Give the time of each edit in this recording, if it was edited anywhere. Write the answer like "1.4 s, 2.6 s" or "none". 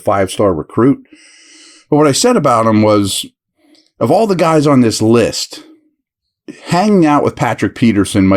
none